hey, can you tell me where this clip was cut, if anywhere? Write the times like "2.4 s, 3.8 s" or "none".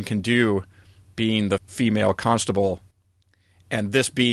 1.6 s